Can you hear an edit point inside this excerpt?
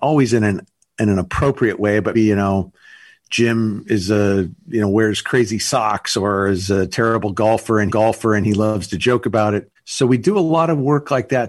yes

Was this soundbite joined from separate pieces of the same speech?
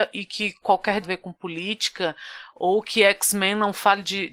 yes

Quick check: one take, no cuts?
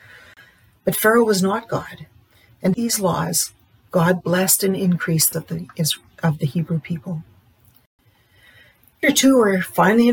no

